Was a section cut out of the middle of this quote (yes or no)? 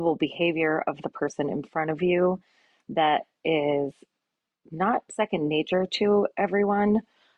no